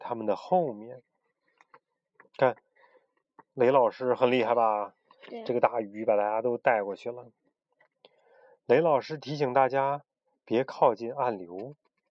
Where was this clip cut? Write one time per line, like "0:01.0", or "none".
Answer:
none